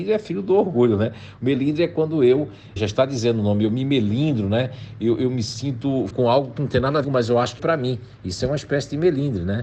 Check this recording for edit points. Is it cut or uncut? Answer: cut